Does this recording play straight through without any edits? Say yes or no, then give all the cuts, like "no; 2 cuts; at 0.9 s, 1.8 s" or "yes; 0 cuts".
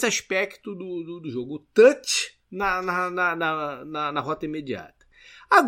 no; 1 cut; at 2.4 s